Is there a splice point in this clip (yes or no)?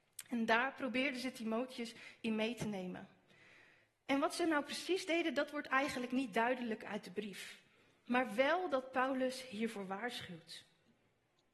no